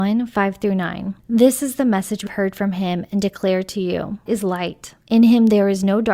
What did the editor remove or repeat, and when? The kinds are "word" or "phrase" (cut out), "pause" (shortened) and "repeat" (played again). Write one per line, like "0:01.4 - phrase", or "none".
0:01.2 - pause
0:02.3 - word
0:04.3 - word
0:05.0 - pause